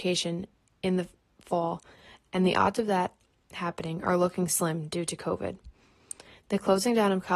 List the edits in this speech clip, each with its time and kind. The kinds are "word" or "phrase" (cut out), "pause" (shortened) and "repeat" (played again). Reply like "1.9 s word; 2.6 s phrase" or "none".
none

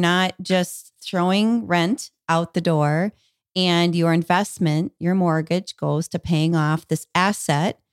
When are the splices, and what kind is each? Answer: none

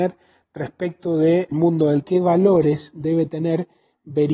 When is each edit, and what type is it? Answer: 1.5 s word; 2.0 s phrase

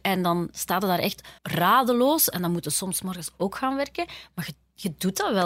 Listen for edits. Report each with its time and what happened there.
1.4 s pause

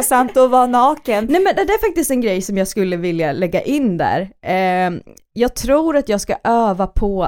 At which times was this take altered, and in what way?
none

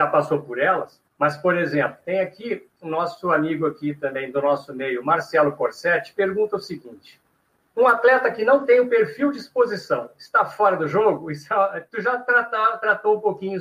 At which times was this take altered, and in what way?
1.1 s pause; 7.5 s pause

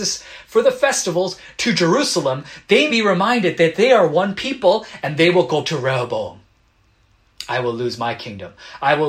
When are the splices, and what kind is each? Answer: 2.9 s word; 5.6 s word

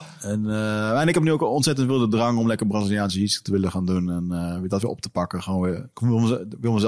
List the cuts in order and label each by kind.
none

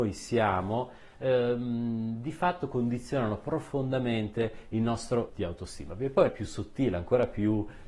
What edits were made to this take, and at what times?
5.3 s word; 6.3 s phrase

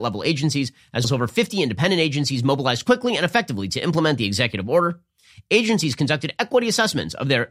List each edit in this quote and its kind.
1.0 s word

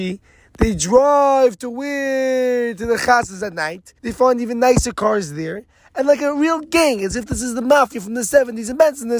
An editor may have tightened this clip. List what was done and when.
4.0 s pause

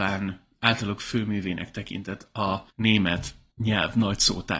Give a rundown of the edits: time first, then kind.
none

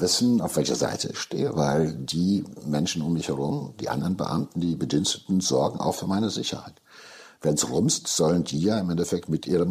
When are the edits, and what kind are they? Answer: none

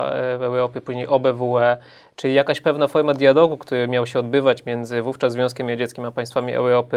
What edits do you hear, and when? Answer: none

